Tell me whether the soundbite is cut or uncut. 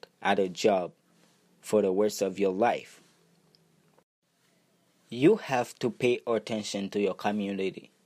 uncut